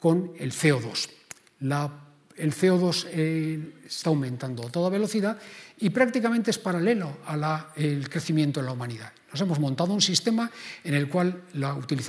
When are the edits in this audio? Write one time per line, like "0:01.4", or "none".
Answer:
0:04.0